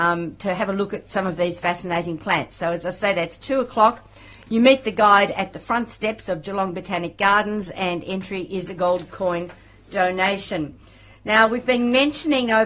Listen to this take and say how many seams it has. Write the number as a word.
zero